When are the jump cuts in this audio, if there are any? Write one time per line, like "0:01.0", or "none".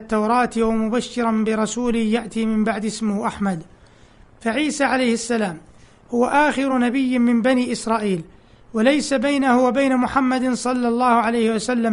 none